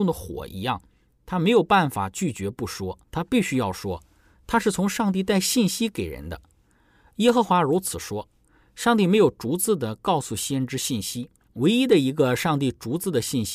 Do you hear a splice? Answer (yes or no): yes